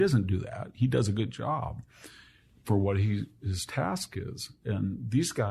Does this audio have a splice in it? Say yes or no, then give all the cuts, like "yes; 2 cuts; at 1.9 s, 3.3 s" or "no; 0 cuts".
no; 0 cuts